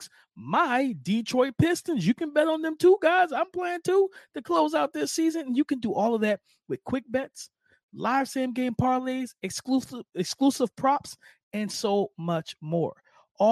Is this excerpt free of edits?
yes; 0 cuts

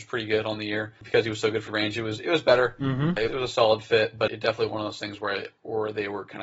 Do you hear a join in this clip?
yes; 5 cuts; at 1.0 s, 1.7 s, 3.3 s, 4.3 s, 4.7 s

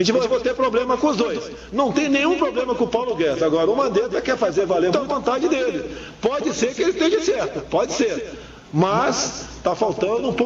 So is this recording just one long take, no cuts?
no; 1 cut; at 4.9 s

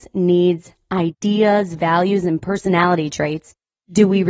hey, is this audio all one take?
yes; 0 cuts

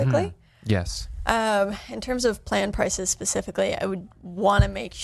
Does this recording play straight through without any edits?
yes; 0 cuts

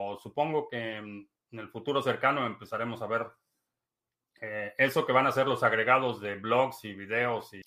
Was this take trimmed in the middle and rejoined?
no; 0 cuts

